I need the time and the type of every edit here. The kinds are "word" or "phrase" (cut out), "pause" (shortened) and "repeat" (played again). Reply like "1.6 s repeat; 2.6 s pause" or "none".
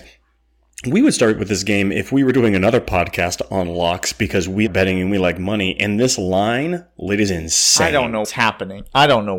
4.7 s word; 7.3 s phrase; 8.2 s word